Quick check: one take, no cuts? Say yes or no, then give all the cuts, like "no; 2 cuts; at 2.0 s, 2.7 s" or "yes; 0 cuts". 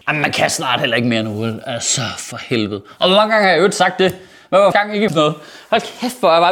no; 2 cuts; at 4.7 s, 5.1 s